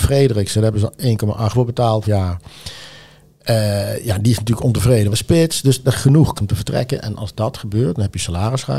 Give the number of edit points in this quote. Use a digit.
5